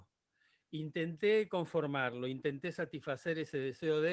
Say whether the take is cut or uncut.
uncut